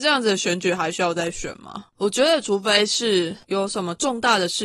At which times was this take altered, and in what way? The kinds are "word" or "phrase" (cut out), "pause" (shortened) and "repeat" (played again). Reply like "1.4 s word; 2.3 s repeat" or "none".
1.9 s pause

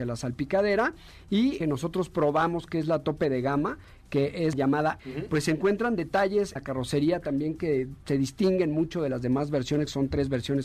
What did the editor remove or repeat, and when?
1.6 s phrase; 4.5 s word; 5.0 s word; 6.6 s word

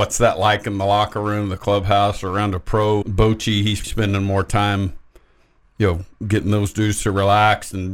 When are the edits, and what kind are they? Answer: 3.0 s word; 3.8 s word

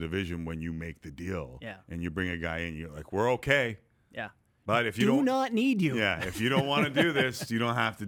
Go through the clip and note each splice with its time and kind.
none

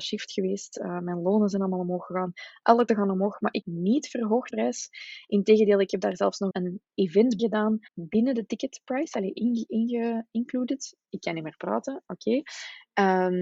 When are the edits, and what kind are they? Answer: 2.9 s word; 3.6 s phrase; 4.5 s word; 6.5 s word; 7.4 s word; 7.9 s pause

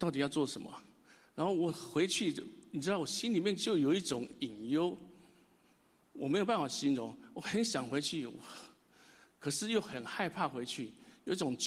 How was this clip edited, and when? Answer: none

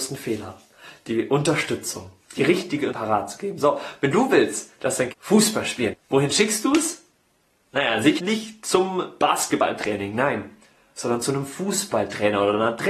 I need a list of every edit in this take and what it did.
2.9 s word; 5.1 s word; 5.9 s word; 8.2 s word

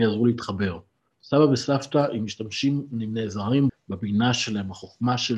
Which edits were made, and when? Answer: 3.7 s word

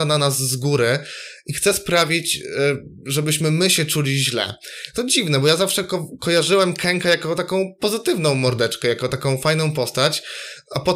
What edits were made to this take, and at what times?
none

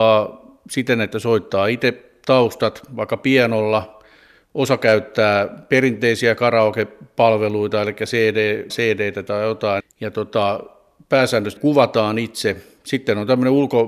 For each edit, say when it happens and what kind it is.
8.7 s word; 9.8 s word; 11.6 s word

